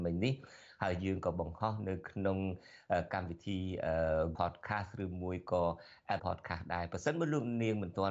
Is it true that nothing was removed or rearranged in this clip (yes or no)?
no